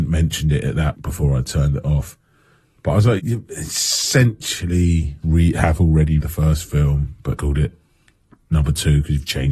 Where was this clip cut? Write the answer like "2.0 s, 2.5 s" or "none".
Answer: 0.9 s, 3.2 s, 5.2 s, 6.2 s, 7.4 s